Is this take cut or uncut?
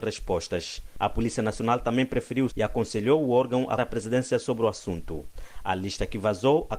cut